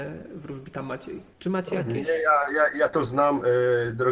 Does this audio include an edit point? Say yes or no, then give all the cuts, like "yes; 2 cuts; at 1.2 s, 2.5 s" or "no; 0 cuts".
yes; 1 cut; at 1.3 s